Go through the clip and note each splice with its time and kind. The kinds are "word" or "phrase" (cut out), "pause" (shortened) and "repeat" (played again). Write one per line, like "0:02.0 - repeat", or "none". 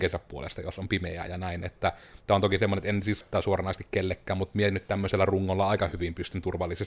0:03.2 - word